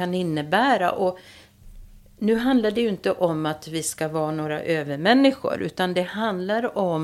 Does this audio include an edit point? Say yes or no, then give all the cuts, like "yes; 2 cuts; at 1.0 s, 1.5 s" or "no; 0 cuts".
no; 0 cuts